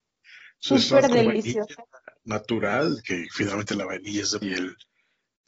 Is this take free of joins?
no; 2 cuts; at 2.2 s, 4.4 s

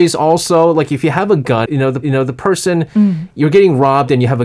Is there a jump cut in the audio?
yes; 2 cuts; at 1.7 s, 2.0 s

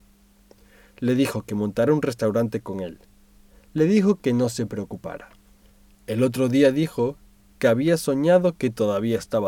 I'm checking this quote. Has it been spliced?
no; 0 cuts

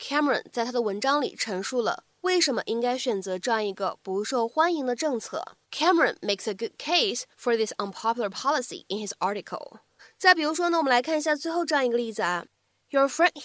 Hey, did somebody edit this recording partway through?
yes; 3 cuts; at 5.6 s, 7.3 s, 10.0 s

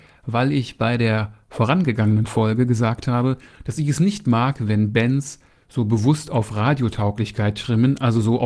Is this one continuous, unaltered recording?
yes; 0 cuts

